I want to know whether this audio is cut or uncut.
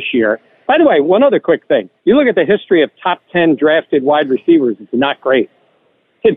cut